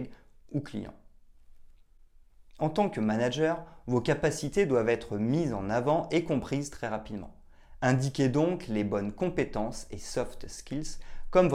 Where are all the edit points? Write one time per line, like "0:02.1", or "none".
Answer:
0:02.5

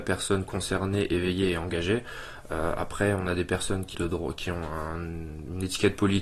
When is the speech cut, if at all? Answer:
0:03.9

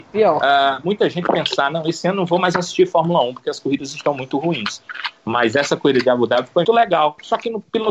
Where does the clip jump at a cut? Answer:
0:06.6

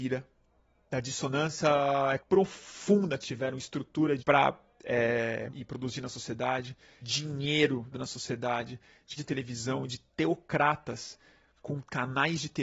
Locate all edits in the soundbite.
0:02.2
0:03.2
0:04.2
0:05.5
0:07.0
0:07.9
0:09.2

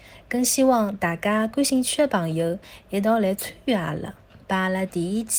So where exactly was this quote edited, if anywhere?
0:04.4

